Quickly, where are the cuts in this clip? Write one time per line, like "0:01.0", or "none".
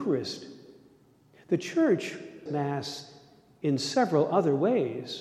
0:02.5